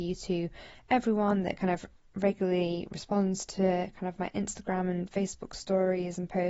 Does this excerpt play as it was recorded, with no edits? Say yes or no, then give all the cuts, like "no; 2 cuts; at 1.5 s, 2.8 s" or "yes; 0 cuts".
yes; 0 cuts